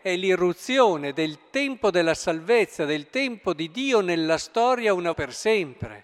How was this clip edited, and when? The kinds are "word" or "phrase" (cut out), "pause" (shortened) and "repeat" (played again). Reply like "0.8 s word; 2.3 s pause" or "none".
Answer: 5.1 s word

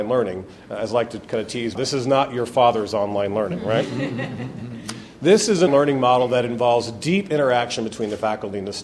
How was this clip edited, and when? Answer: 1.7 s word; 5.7 s word

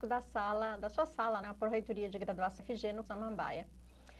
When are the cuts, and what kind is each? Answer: 1.4 s word; 2.6 s word; 3.1 s word

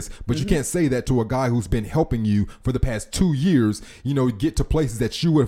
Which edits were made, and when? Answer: none

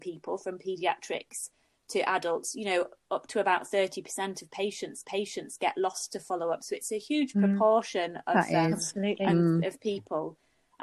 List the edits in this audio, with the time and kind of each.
5.0 s repeat

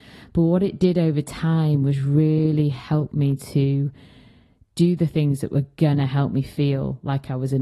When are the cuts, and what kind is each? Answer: none

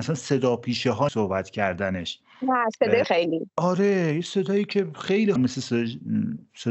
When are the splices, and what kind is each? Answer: 1.1 s word; 3.0 s word; 5.4 s phrase

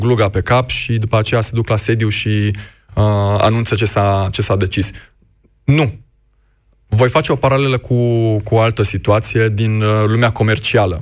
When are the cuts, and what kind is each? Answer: none

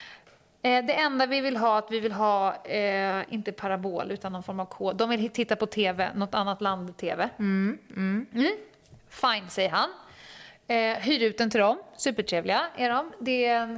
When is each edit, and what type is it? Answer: none

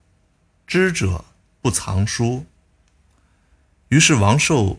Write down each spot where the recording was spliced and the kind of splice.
none

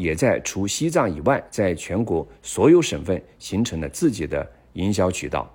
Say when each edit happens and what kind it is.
none

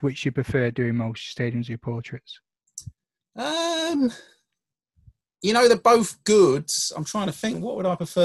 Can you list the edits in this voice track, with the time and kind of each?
none

